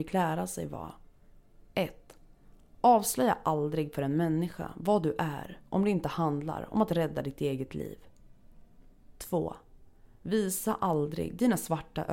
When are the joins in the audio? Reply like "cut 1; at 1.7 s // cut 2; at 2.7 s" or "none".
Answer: none